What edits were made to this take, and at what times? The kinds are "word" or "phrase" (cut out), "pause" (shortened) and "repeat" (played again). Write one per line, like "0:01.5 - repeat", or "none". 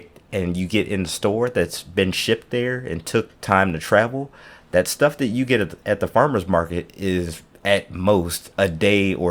none